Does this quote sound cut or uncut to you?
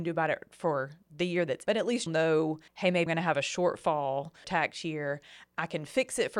cut